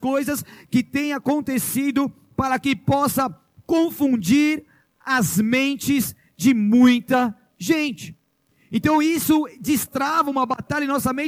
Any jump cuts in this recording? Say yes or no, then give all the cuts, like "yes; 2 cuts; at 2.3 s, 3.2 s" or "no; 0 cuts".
no; 0 cuts